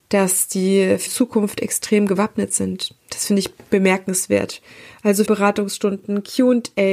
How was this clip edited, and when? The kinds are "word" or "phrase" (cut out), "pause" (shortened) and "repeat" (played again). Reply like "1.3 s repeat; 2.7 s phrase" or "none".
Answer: 1.1 s word; 5.3 s word